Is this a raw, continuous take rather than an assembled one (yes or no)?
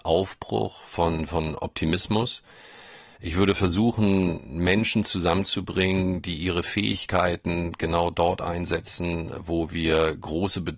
yes